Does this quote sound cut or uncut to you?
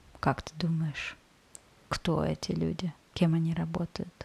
uncut